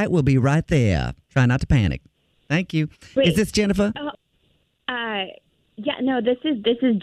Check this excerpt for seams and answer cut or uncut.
uncut